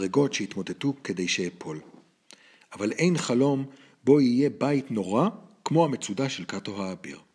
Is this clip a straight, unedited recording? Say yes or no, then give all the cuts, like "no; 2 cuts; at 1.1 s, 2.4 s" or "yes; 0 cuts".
yes; 0 cuts